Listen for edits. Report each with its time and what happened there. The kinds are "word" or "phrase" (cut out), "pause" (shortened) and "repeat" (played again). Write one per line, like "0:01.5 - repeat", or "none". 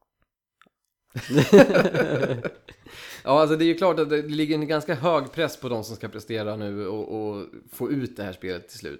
none